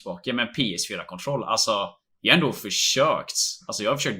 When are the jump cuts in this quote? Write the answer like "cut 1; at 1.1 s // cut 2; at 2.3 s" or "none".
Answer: none